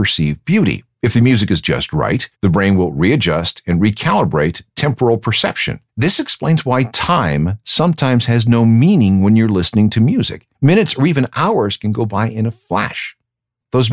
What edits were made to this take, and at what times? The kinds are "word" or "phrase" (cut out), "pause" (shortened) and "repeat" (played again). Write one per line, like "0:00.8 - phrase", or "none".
0:00.9 - pause
0:02.3 - pause
0:05.9 - pause
0:10.5 - pause